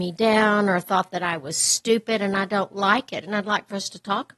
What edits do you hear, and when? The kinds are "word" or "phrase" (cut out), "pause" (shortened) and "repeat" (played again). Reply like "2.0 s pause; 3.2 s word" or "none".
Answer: none